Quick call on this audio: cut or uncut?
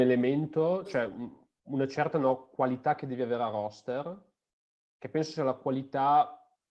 uncut